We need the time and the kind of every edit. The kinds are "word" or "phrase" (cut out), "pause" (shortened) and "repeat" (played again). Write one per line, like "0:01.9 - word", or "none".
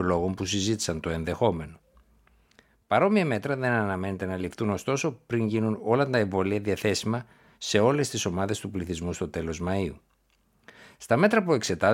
none